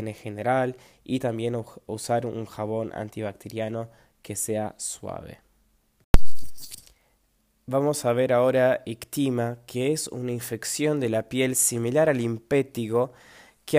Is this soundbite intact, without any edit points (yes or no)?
yes